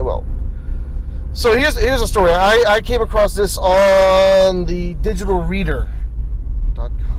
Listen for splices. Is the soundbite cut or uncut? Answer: uncut